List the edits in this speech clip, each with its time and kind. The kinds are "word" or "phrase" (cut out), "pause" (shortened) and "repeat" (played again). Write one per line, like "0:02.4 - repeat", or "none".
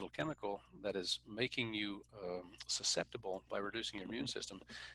0:02.1 - pause